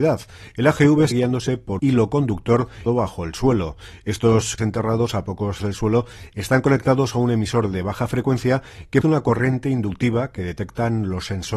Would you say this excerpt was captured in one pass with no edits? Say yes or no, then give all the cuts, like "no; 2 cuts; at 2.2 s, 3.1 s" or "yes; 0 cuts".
no; 6 cuts; at 1.1 s, 1.8 s, 2.9 s, 4.6 s, 5.6 s, 9.0 s